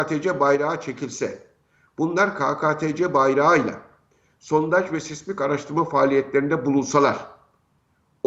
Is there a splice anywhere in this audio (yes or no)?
no